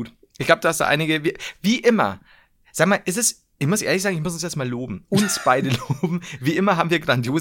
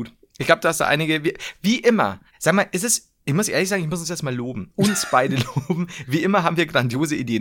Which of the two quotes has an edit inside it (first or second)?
second